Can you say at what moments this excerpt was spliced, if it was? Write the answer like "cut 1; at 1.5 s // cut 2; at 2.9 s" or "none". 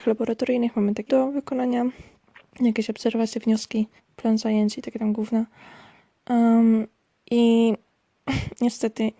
cut 1; at 1.1 s // cut 2; at 4.0 s